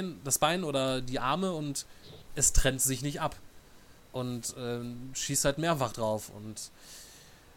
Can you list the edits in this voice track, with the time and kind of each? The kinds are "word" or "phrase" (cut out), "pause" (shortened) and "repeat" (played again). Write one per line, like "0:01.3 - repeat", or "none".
0:02.3 - pause
0:04.0 - pause